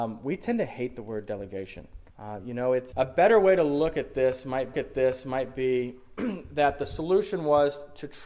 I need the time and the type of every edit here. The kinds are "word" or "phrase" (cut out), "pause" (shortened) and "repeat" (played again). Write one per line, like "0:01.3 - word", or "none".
0:02.1 - pause
0:02.9 - word
0:04.7 - repeat